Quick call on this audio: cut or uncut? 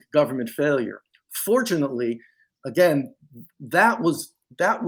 uncut